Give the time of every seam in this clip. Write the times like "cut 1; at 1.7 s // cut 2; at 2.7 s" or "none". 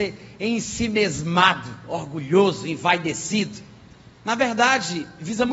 cut 1; at 4.1 s